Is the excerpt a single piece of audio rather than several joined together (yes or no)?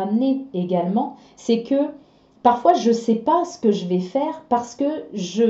yes